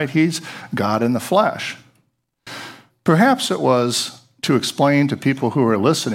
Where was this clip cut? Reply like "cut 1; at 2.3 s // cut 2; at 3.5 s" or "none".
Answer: none